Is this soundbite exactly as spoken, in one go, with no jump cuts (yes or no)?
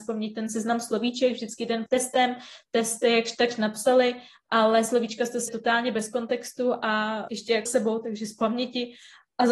no